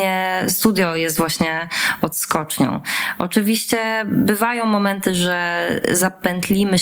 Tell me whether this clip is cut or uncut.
uncut